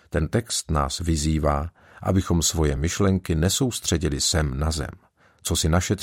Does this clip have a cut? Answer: no; 0 cuts

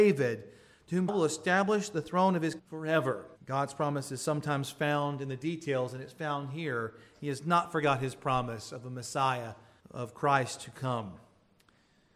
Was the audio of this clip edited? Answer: yes; 4 cuts; at 1.1 s, 2.6 s, 3.4 s, 9.8 s

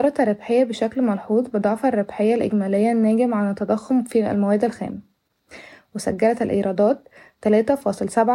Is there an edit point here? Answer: no; 0 cuts

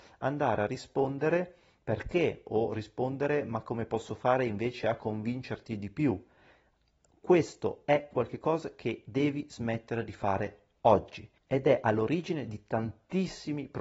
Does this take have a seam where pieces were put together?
no; 0 cuts

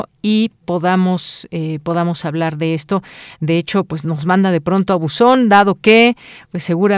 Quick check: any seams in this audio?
no; 0 cuts

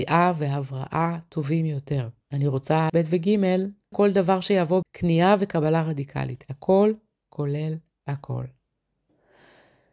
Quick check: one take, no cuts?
no; 4 cuts; at 2.2 s, 2.9 s, 3.9 s, 4.8 s

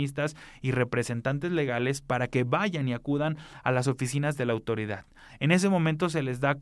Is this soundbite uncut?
yes; 0 cuts

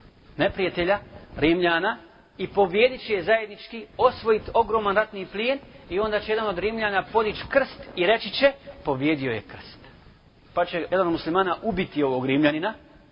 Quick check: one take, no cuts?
yes; 0 cuts

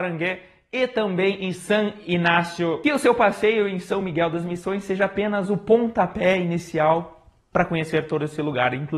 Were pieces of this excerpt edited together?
no; 0 cuts

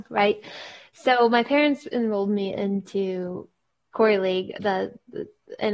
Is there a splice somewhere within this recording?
no; 0 cuts

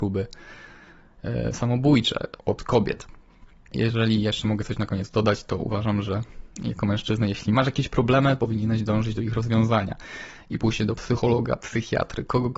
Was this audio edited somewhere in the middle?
yes; 1 cut; at 2.4 s

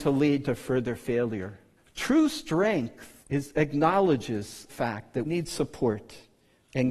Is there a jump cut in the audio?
yes; 4 cuts; at 1.8 s, 3.2 s, 4.7 s, 5.2 s

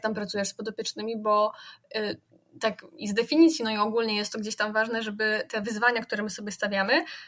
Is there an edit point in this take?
no; 0 cuts

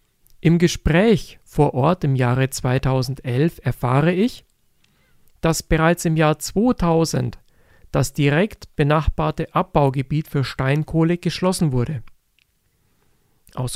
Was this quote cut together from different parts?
no; 0 cuts

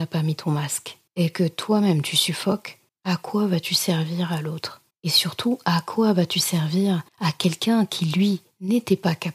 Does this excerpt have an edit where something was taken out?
yes; 4 cuts; at 1.1 s, 2.9 s, 4.9 s, 7.1 s

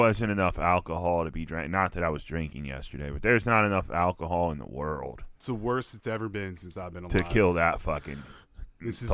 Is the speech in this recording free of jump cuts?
yes; 0 cuts

